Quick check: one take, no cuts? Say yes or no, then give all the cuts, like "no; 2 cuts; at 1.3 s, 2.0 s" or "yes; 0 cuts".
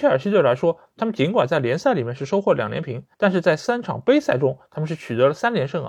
no; 1 cut; at 3.1 s